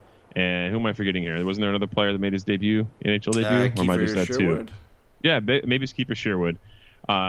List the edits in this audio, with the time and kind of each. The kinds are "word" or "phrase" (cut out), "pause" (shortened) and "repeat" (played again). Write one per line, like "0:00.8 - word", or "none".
none